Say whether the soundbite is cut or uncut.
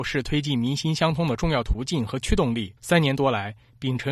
cut